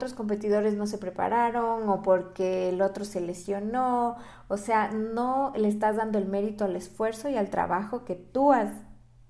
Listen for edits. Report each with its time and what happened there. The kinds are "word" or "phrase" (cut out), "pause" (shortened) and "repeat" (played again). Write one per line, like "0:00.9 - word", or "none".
none